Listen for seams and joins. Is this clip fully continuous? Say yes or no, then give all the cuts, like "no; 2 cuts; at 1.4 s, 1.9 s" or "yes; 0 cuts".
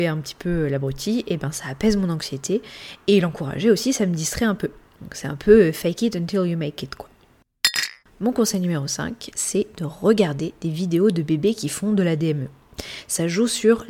yes; 0 cuts